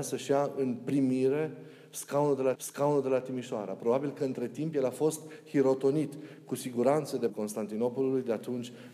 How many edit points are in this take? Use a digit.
2